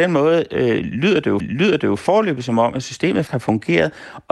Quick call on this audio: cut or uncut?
cut